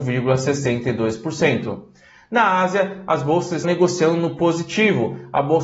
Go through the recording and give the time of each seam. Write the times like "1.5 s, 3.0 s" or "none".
3.6 s